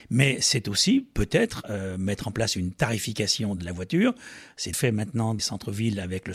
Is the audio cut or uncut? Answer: cut